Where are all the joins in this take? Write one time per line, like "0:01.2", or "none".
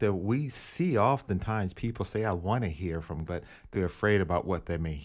0:03.3
0:03.7